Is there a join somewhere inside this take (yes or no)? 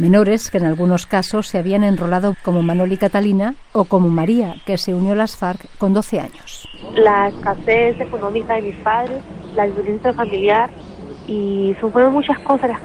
yes